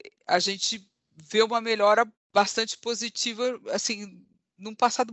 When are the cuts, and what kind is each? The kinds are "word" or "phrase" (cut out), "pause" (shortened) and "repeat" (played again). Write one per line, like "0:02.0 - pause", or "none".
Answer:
0:02.1 - pause